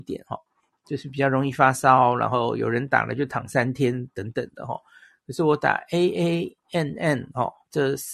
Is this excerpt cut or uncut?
uncut